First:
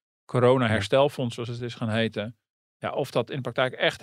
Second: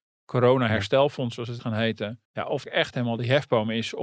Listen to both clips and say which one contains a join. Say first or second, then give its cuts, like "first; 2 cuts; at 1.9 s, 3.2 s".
second; 3 cuts; at 1.6 s, 2.2 s, 2.6 s